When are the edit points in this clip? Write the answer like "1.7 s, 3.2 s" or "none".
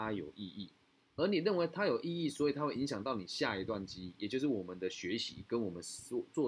none